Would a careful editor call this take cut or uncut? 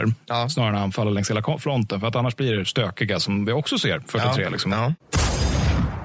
cut